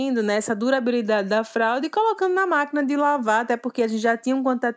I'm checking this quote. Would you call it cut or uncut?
uncut